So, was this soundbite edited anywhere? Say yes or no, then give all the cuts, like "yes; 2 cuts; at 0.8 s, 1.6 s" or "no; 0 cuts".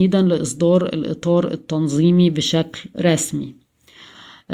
no; 0 cuts